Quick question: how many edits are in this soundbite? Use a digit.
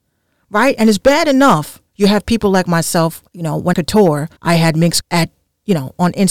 5